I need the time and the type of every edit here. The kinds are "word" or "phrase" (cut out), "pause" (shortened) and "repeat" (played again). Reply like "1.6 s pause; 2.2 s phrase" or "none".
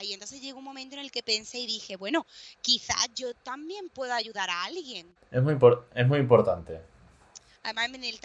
5.2 s pause